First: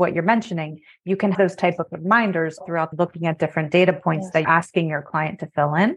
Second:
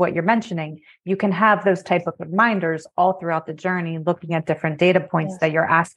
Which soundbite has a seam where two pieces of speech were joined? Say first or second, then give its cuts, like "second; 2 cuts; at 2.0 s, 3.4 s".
first; 4 cuts; at 1.3 s, 2.6 s, 2.9 s, 4.4 s